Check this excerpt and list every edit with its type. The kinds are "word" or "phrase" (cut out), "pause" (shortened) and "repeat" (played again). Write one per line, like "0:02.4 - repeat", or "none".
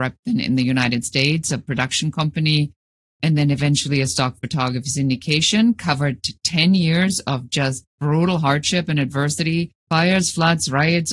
0:09.8 - pause

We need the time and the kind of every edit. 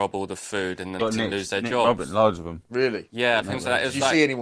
0:01.0 - phrase
0:03.4 - word

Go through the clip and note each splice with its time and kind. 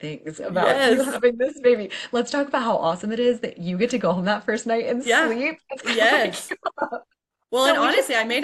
0:05.8 - phrase

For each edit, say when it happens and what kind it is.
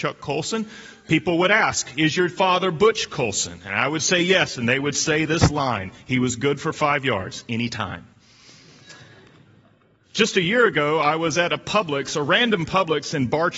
none

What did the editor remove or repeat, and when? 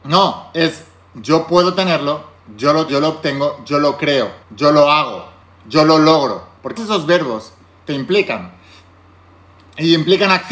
0:02.9 - word
0:04.4 - pause
0:05.4 - pause
0:06.8 - word

